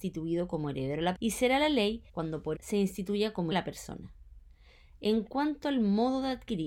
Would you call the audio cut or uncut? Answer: cut